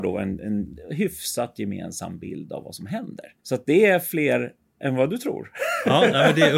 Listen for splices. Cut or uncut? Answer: cut